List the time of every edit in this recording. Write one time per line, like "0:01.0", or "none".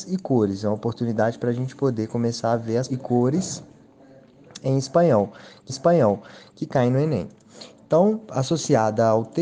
0:02.9
0:05.7